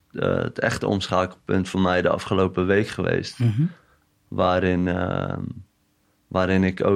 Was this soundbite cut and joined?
no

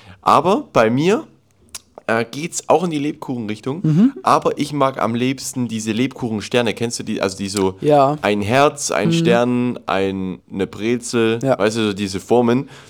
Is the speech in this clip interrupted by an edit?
yes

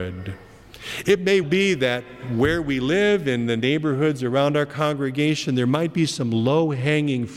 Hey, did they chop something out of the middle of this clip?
yes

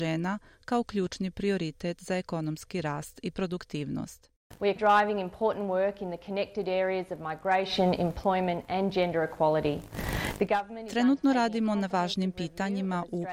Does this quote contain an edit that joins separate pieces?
yes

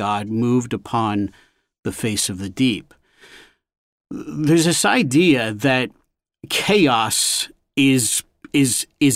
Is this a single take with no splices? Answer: yes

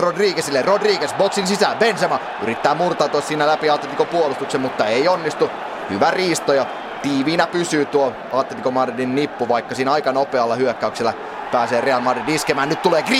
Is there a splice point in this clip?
no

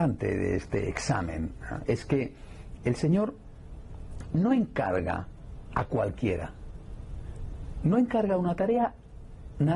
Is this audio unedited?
no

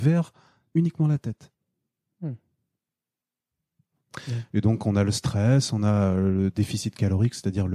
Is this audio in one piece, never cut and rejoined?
yes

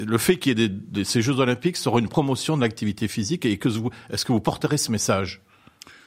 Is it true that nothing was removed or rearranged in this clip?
yes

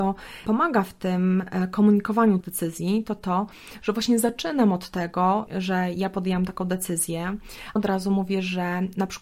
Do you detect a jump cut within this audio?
yes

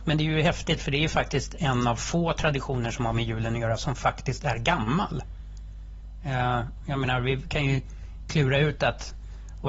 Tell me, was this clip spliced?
no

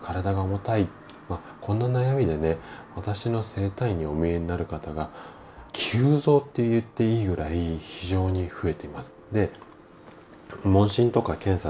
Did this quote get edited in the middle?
yes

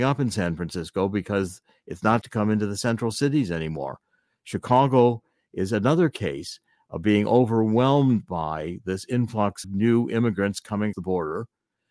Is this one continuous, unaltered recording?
no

